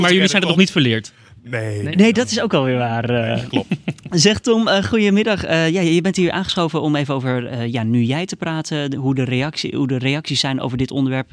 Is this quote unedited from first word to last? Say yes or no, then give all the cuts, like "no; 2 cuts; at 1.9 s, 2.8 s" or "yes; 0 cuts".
yes; 0 cuts